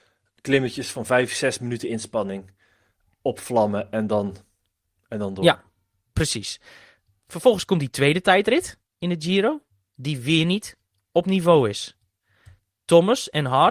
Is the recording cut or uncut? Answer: uncut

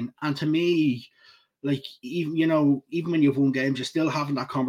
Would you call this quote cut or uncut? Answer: uncut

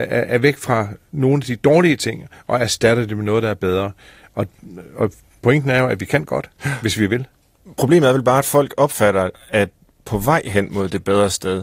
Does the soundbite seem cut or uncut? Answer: uncut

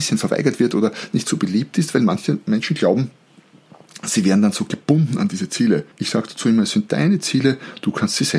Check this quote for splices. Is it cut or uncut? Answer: cut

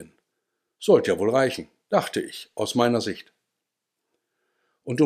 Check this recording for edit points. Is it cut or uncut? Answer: uncut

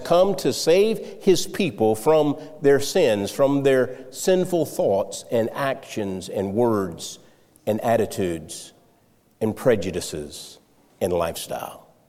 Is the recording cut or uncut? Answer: uncut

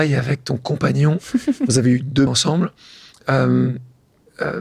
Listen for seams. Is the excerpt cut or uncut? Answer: cut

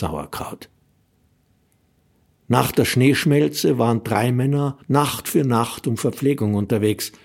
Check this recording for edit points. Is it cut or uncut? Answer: cut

